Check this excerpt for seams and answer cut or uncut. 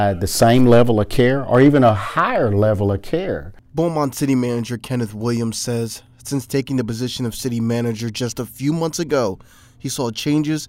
uncut